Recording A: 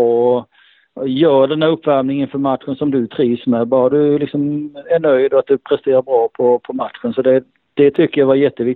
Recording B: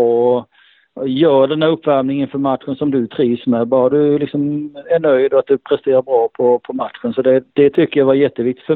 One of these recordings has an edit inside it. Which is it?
B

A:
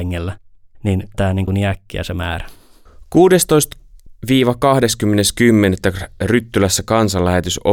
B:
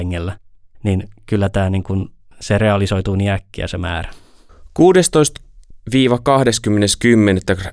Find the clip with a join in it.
A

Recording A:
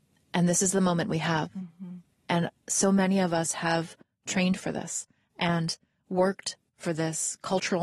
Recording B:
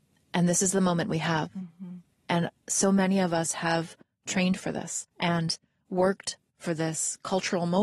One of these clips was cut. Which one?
B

